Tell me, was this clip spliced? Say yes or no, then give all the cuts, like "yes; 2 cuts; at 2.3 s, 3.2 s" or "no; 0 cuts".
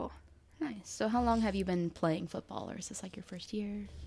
no; 0 cuts